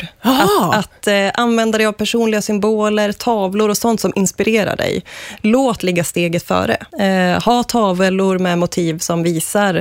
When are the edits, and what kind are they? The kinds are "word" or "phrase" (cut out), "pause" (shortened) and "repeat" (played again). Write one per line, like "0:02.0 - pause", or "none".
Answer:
0:05.8 - word
0:06.9 - pause